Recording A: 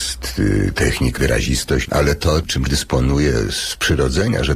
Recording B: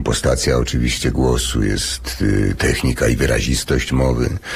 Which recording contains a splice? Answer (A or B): A